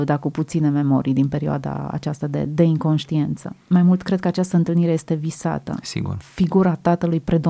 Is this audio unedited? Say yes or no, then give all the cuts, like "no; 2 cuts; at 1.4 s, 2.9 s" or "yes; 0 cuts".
yes; 0 cuts